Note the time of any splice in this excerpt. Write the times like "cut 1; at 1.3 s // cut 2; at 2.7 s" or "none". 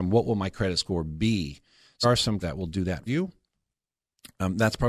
cut 1; at 2.0 s // cut 2; at 2.4 s // cut 3; at 3.1 s